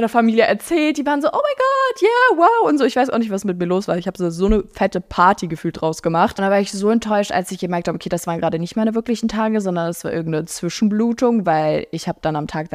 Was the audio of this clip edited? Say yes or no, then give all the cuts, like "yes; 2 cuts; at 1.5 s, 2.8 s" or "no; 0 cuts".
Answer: no; 0 cuts